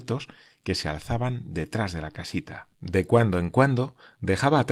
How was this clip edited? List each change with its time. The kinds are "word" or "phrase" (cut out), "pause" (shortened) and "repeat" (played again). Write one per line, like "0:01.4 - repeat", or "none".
0:02.7 - pause